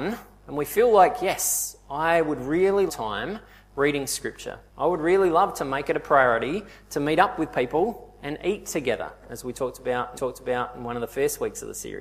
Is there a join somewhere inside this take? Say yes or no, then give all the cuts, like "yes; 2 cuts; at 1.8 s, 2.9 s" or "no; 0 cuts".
yes; 3 cuts; at 2.9 s, 4.7 s, 10.2 s